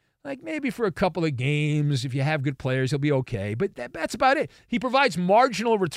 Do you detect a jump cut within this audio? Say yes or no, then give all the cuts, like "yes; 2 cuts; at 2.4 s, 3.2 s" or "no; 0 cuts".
no; 0 cuts